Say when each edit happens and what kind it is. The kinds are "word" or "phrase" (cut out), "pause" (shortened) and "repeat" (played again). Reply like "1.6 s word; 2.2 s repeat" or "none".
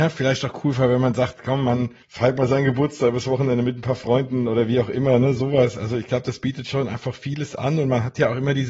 2.0 s pause